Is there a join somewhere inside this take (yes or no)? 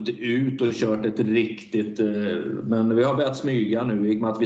no